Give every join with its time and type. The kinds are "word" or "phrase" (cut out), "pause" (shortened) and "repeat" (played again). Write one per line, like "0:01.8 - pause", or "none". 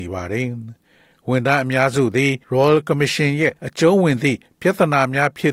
0:02.4 - pause
0:03.6 - pause